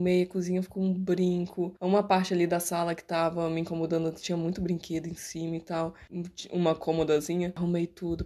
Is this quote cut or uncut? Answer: uncut